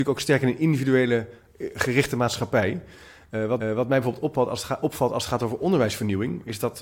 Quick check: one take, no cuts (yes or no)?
no